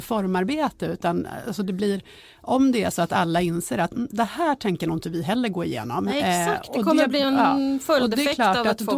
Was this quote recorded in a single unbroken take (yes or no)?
yes